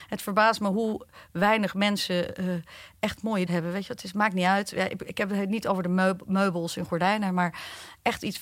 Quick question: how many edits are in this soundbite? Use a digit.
2